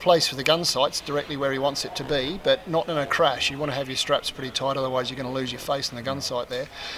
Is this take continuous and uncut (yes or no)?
yes